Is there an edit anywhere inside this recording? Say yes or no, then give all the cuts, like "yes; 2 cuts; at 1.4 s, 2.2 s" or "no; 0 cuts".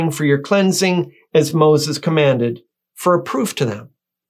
no; 0 cuts